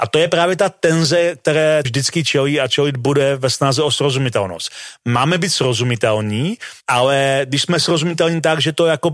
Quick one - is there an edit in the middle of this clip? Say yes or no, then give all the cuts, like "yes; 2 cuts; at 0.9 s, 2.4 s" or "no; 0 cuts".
yes; 2 cuts; at 1.8 s, 6.8 s